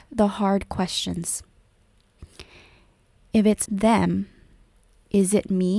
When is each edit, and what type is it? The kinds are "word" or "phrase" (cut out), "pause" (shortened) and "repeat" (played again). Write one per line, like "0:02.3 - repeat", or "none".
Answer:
0:03.7 - word